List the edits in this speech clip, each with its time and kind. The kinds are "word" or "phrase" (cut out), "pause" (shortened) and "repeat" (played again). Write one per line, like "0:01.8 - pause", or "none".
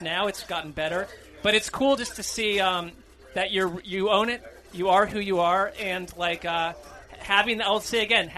none